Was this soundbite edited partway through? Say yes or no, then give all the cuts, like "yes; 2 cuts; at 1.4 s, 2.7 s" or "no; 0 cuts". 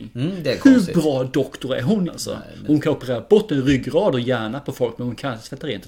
yes; 1 cut; at 2.1 s